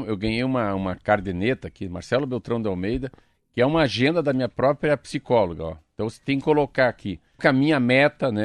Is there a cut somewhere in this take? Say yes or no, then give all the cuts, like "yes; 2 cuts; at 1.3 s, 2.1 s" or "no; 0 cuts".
yes; 1 cut; at 7.4 s